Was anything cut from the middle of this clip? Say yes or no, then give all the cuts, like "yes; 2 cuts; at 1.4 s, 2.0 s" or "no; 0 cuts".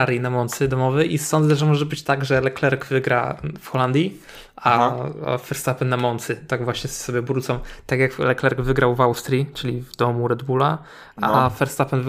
no; 0 cuts